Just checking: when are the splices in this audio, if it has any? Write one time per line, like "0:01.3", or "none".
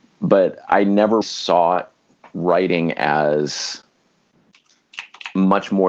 0:01.2